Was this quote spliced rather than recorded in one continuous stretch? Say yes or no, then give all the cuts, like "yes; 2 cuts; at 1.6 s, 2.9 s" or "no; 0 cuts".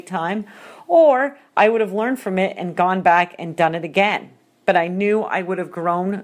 no; 0 cuts